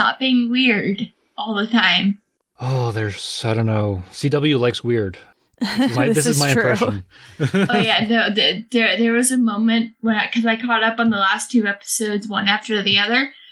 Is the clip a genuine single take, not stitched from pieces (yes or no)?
no